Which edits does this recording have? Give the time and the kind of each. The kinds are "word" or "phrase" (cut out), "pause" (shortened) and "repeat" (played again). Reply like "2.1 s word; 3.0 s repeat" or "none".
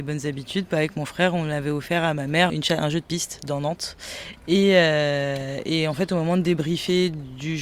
2.5 s phrase